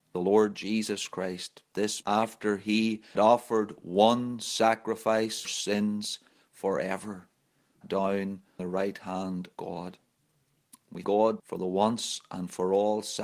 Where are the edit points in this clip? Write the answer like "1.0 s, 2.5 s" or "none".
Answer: 1.7 s, 2.0 s, 3.1 s, 5.4 s, 7.8 s, 8.6 s, 9.5 s, 11.0 s, 11.4 s